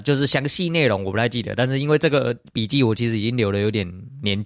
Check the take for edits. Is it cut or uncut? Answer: cut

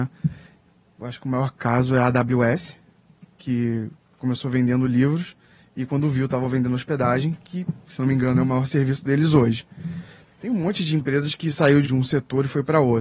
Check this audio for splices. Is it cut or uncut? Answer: cut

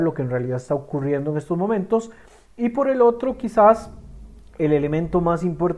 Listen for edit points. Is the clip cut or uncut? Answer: uncut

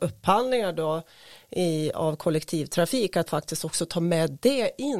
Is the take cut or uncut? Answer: cut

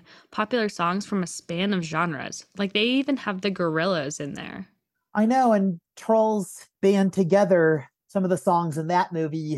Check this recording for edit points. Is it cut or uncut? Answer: uncut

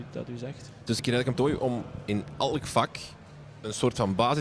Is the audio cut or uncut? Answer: cut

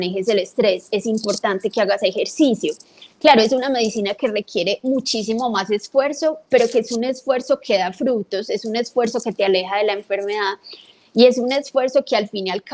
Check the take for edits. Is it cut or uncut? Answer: uncut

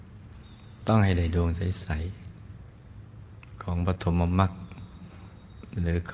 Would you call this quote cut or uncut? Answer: uncut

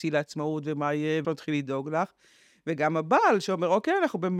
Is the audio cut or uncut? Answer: cut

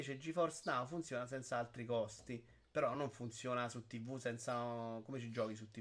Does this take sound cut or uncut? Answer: uncut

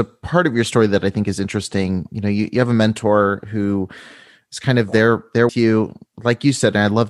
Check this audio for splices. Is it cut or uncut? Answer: cut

